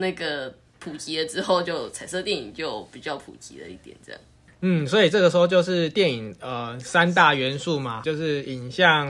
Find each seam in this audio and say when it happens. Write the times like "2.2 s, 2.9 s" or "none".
8.0 s